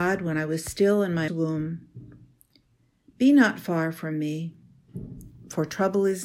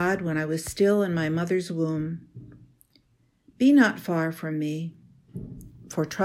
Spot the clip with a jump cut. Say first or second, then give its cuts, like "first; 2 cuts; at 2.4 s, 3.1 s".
first; 1 cut; at 1.3 s